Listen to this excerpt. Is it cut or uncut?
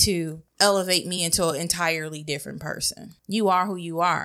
uncut